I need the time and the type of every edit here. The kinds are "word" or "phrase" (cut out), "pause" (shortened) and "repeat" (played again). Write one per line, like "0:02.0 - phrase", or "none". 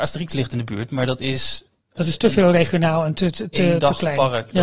none